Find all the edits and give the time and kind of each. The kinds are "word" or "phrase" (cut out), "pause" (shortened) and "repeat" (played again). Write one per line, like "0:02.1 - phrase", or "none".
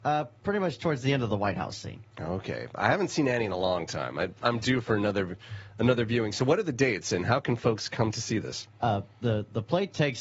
0:02.1 - pause
0:04.4 - word
0:08.7 - pause

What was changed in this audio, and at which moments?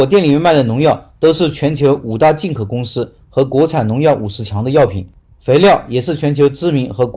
none

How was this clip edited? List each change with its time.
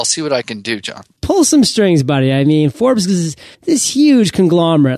0:03.5 - pause

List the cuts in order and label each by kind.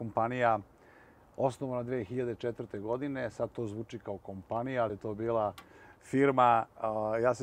0:04.9 - word

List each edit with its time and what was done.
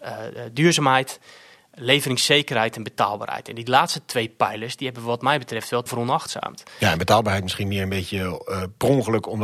0:05.9 - word

